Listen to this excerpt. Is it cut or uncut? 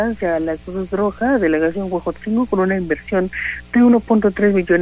uncut